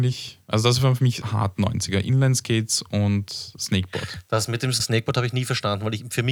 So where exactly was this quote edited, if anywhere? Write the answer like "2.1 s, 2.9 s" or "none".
1.2 s, 3.6 s, 4.8 s